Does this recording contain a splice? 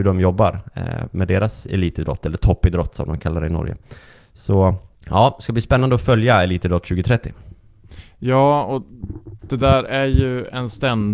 yes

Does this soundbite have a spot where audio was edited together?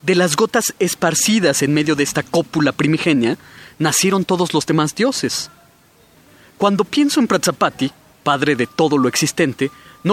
no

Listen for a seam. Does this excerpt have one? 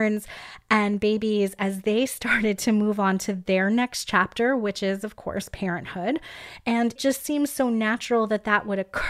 yes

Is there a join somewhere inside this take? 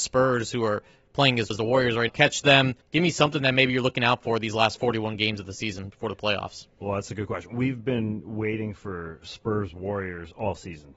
yes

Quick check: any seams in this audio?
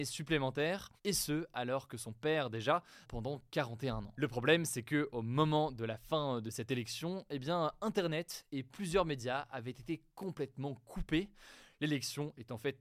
yes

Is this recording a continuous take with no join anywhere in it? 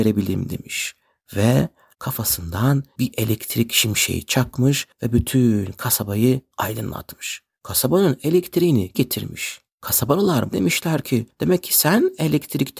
no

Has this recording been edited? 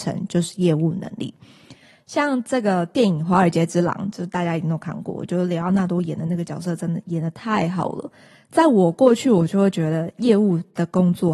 no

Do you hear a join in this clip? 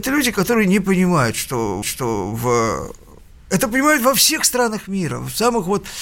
yes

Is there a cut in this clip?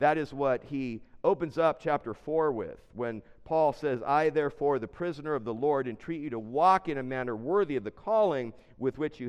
no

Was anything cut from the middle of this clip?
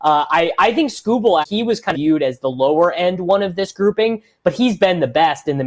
yes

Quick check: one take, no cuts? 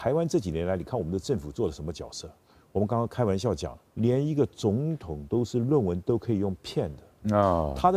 no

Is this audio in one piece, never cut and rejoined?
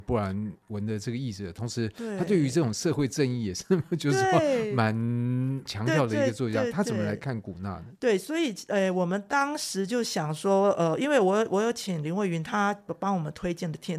yes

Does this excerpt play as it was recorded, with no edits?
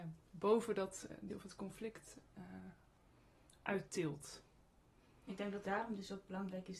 no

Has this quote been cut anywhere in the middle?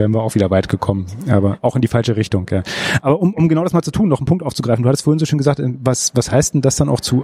no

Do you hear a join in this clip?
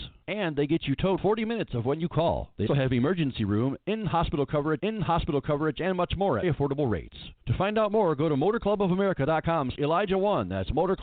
yes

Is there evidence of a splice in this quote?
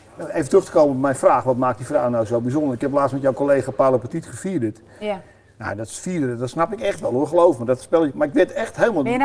no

